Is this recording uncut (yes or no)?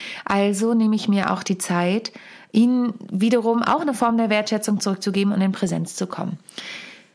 yes